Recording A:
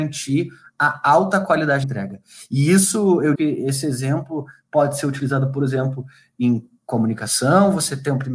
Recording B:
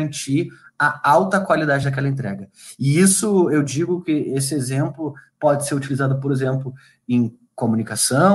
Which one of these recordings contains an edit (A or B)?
A